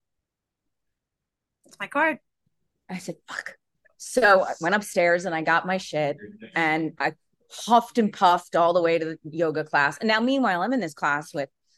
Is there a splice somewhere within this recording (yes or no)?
no